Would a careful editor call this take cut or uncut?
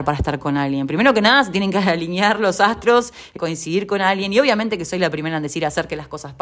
cut